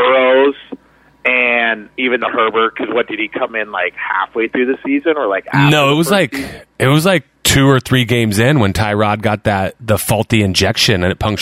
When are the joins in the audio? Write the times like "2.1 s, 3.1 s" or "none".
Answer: 7.4 s